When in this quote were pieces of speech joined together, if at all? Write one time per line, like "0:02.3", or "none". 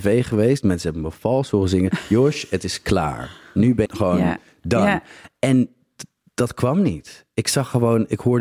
0:03.9